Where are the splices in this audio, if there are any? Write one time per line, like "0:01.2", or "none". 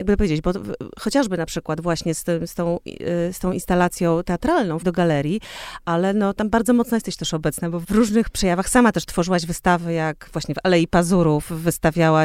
0:04.8
0:07.8